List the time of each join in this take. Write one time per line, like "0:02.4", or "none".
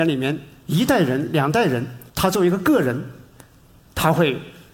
0:02.1